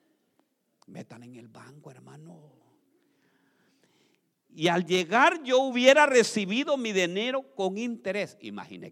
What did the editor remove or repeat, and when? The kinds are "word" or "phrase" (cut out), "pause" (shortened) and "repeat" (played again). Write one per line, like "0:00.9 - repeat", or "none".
none